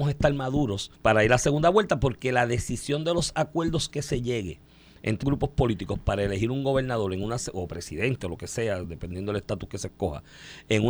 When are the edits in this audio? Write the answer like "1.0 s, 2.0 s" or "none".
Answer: 1.0 s, 5.2 s